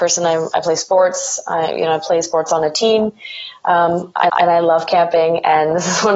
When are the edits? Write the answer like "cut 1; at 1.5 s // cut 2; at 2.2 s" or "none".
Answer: cut 1; at 4.3 s